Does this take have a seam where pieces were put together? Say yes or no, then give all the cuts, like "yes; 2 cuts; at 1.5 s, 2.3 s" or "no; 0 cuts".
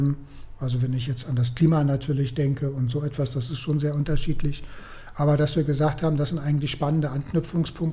no; 0 cuts